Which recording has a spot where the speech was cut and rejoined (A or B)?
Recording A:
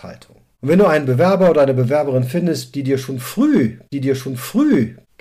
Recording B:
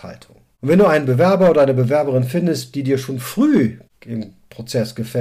A